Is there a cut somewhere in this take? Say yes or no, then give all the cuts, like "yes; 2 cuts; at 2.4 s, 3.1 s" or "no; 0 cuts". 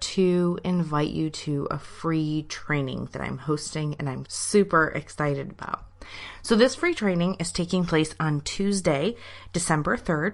yes; 1 cut; at 4.3 s